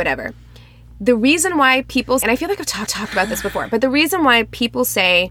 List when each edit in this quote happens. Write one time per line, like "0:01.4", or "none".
0:02.2
0:02.9